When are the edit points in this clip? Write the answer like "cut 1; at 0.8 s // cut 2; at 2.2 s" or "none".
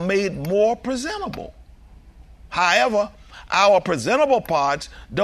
none